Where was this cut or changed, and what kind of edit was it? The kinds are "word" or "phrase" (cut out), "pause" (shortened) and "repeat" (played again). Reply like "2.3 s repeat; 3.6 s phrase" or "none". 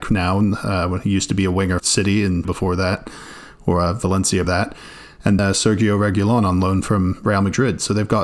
1.8 s word; 2.4 s word; 4.4 s word; 5.4 s word

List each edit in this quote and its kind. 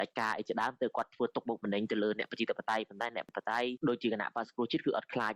none

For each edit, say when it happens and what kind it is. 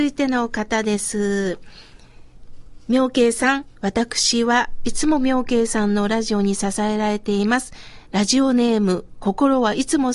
3.7 s pause

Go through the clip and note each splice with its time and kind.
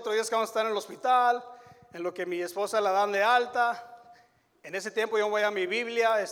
none

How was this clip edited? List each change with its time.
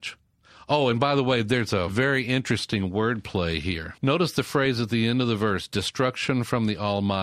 4.0 s pause

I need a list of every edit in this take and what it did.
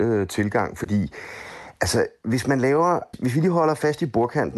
3.1 s word

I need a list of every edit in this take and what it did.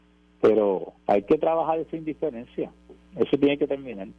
1.0 s pause

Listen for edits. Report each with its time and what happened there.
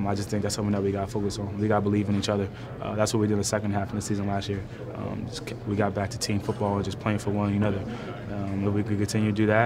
none

